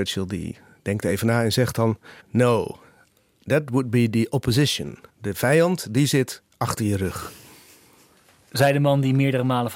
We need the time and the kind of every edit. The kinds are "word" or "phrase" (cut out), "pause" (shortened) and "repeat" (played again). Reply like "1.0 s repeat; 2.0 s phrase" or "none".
2.2 s pause; 5.1 s pause